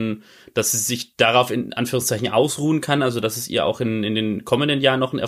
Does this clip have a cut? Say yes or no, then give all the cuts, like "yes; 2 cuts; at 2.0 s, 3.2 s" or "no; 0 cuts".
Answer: no; 0 cuts